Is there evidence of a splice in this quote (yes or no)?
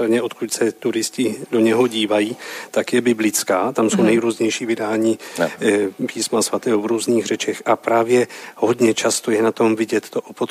no